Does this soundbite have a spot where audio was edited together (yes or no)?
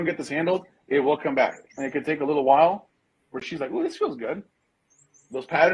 no